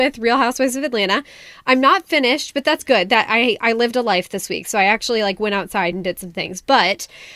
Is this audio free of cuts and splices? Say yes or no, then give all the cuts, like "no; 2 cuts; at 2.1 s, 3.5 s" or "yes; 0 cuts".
yes; 0 cuts